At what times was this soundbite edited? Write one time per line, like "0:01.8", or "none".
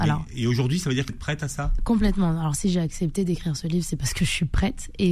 0:01.1